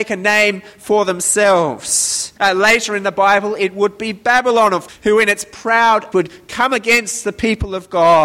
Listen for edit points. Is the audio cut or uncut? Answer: cut